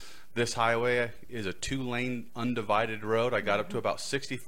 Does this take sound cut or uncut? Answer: uncut